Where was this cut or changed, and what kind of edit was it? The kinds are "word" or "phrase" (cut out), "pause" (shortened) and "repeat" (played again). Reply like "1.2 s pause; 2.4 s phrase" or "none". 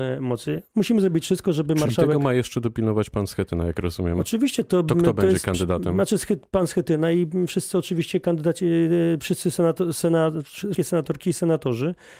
10.7 s word